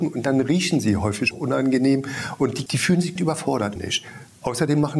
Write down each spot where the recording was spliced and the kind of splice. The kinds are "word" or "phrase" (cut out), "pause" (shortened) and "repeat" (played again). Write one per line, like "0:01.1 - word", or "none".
0:01.3 - word
0:02.7 - word
0:03.2 - word
0:03.8 - phrase